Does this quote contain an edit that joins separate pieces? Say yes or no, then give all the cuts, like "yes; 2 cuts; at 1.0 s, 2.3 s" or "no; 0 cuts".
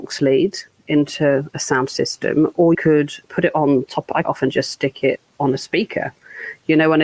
yes; 4 cuts; at 2.7 s, 3.2 s, 4.2 s, 5.3 s